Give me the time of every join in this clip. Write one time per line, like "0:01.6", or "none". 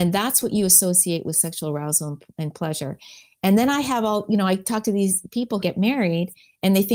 0:05.6